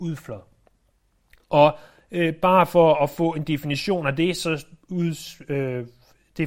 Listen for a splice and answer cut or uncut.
uncut